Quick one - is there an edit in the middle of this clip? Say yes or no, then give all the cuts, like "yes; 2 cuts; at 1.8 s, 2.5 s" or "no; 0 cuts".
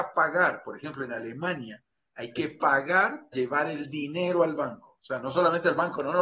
yes; 1 cut; at 3.3 s